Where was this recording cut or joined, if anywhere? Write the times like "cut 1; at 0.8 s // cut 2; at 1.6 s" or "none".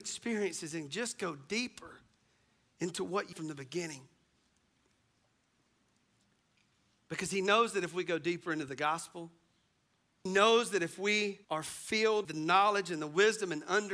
cut 1; at 3.3 s // cut 2; at 10.3 s // cut 3; at 11.4 s // cut 4; at 12.2 s